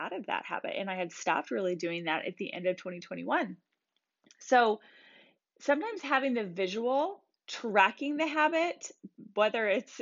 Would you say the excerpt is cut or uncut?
uncut